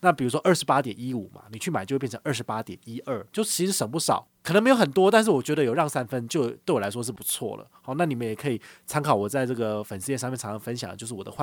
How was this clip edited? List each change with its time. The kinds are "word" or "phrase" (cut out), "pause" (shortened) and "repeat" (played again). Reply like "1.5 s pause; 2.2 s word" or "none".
3.3 s word